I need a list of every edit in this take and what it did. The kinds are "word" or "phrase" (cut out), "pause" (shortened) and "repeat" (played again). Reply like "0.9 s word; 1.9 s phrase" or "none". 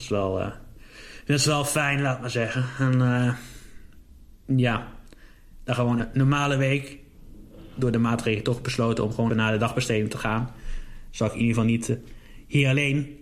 6.0 s word; 9.3 s word